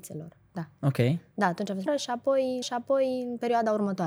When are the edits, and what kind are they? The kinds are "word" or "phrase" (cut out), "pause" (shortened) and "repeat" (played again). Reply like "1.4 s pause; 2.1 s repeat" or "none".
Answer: 1.9 s word; 2.6 s repeat